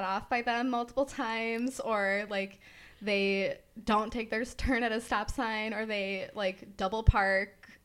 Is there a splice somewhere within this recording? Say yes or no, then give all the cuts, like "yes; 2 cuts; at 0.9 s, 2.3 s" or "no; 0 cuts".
no; 0 cuts